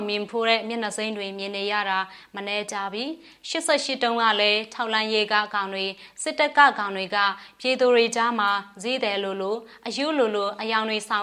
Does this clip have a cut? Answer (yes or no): no